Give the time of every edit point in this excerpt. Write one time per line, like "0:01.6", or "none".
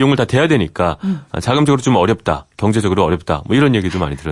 none